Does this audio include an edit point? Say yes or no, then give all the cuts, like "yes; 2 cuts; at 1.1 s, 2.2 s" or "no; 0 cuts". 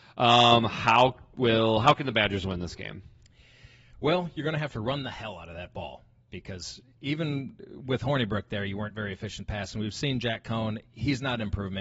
no; 0 cuts